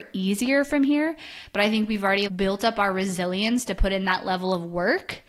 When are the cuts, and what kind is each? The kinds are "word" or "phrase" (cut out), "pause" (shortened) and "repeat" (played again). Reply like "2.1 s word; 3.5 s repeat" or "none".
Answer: 2.3 s word